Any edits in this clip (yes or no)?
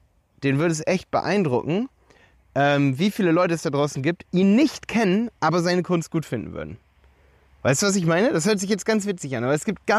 yes